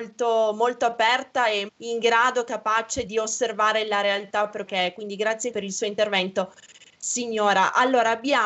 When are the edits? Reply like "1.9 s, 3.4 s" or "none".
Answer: 1.7 s, 3.1 s, 4.7 s, 5.5 s